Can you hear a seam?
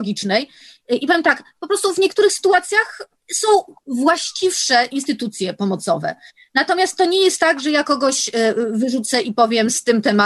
no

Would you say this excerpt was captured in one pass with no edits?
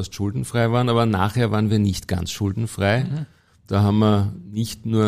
yes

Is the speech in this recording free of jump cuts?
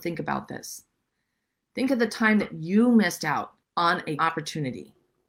no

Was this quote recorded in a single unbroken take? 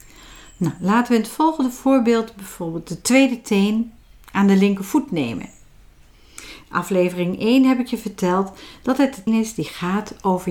no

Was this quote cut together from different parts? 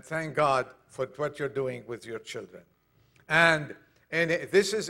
no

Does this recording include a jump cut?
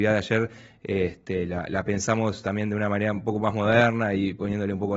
no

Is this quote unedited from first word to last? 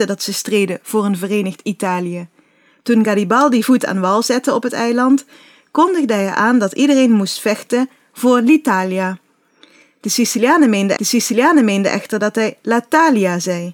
no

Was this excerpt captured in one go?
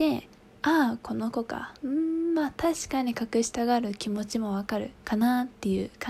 no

